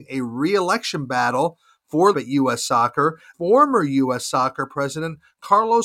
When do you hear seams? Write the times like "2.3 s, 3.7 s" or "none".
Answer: 2.1 s, 3.3 s